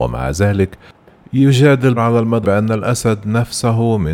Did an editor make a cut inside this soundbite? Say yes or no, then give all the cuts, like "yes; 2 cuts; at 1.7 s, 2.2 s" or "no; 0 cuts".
yes; 2 cuts; at 2.0 s, 2.4 s